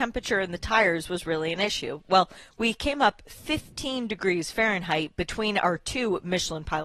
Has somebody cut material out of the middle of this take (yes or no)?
no